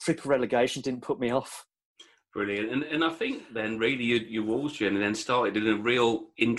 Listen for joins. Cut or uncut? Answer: uncut